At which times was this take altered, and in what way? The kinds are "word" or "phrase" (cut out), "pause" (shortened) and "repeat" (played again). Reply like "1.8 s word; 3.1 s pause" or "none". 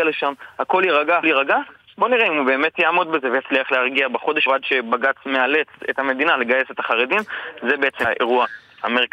1.2 s word; 4.5 s word; 8.0 s word